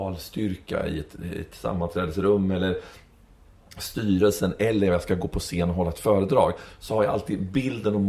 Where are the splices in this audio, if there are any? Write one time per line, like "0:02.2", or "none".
none